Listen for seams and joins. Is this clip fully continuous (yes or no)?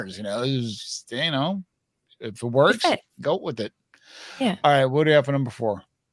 yes